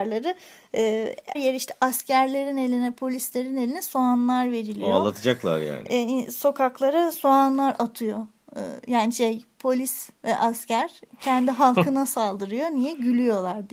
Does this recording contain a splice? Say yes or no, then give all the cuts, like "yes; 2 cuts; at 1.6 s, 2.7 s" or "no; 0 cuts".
yes; 1 cut; at 1.3 s